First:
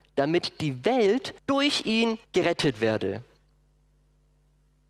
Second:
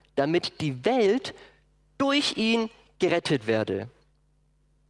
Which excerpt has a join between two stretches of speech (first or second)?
first